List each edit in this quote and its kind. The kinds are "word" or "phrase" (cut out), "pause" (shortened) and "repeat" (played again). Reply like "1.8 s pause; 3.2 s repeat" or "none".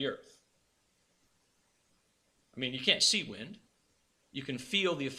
none